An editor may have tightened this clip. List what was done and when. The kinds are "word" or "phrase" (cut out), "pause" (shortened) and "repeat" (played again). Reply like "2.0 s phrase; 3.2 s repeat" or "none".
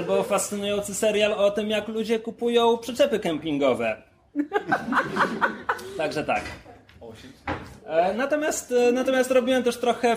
none